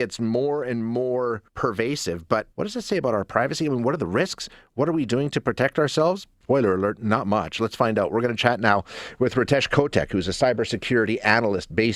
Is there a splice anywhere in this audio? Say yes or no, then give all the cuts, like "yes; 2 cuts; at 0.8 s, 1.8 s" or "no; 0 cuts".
yes; 3 cuts; at 1.5 s, 2.5 s, 6.3 s